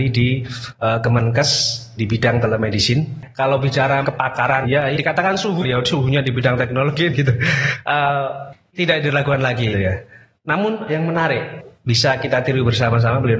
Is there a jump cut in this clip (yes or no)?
yes